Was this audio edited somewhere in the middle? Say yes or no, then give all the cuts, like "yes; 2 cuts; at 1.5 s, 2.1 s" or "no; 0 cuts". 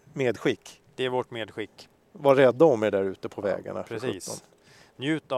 no; 0 cuts